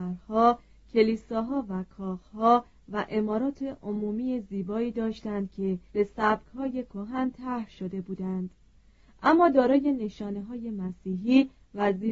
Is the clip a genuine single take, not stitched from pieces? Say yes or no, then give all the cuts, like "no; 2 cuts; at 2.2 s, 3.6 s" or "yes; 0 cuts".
no; 1 cut; at 5.9 s